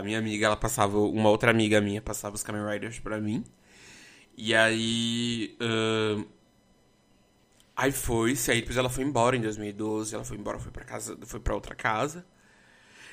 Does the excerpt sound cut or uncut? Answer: uncut